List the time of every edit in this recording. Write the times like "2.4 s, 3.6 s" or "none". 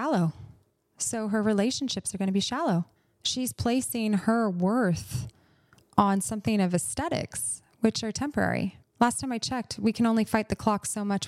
3.0 s, 8.8 s

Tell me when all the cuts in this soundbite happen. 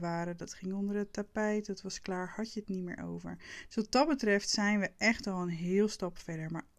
none

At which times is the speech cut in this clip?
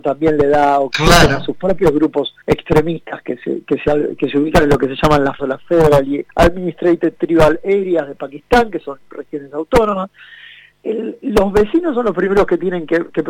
2.4 s, 5.4 s, 6.3 s, 10.7 s

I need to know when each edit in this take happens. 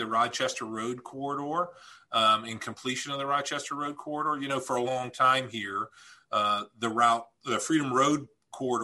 4.8 s

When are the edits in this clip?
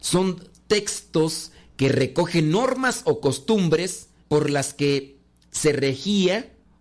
4.2 s

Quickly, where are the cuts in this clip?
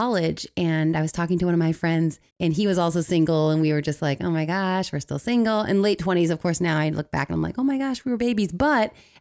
2.3 s

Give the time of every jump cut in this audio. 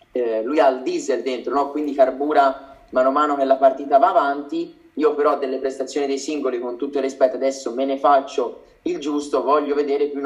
none

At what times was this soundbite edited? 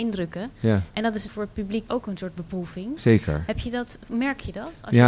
1.3 s, 1.9 s

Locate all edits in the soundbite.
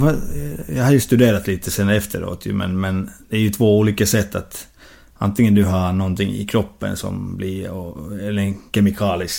none

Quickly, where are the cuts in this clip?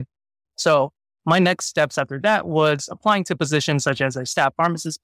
none

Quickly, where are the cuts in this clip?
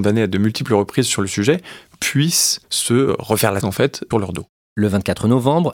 2.6 s, 3.6 s, 4.1 s

